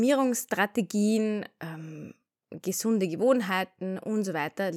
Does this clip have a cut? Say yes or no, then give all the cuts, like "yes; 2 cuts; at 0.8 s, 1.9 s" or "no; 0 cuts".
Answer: no; 0 cuts